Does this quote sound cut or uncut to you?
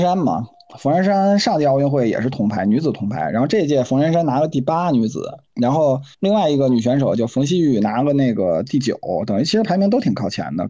cut